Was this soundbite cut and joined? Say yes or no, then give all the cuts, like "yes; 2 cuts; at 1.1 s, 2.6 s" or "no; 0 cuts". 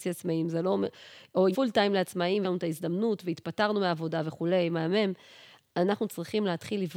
yes; 2 cuts; at 1.5 s, 2.4 s